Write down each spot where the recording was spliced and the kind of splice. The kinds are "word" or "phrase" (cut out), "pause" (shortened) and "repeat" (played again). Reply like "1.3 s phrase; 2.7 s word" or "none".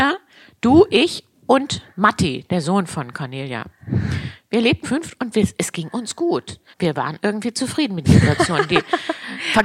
1.9 s pause; 4.8 s word; 6.7 s pause; 8.0 s word